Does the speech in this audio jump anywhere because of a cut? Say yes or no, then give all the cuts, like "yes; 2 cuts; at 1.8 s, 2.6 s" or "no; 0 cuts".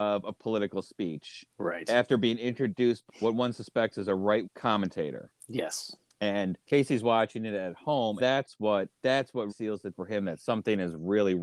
yes; 7 cuts; at 3.1 s, 4.4 s, 6.6 s, 8.2 s, 8.9 s, 9.5 s, 9.9 s